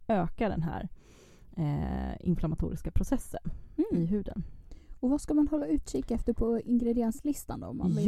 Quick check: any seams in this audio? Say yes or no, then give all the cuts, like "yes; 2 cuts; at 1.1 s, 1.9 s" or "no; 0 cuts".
no; 0 cuts